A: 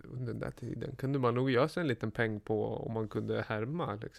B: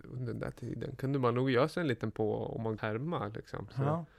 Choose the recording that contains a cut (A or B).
B